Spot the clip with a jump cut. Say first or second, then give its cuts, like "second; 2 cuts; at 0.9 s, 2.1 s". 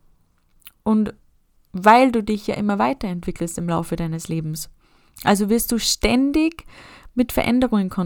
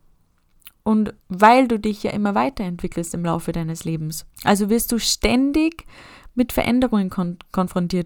second; 2 cuts; at 1.2 s, 4.3 s